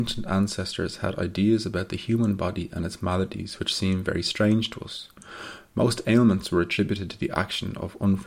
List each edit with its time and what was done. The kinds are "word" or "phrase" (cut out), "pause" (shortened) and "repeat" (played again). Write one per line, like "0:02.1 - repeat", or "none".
none